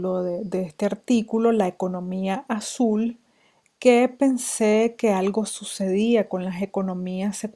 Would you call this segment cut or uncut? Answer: uncut